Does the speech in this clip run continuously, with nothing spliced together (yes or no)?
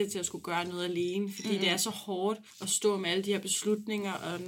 no